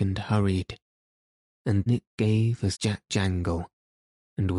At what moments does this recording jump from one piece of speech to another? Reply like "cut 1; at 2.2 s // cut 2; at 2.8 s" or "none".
cut 1; at 1.9 s // cut 2; at 2.7 s // cut 3; at 3.1 s